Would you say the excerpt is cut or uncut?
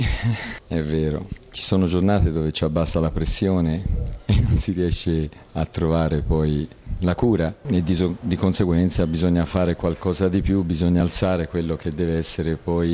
uncut